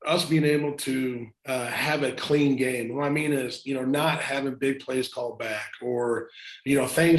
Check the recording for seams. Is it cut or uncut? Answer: cut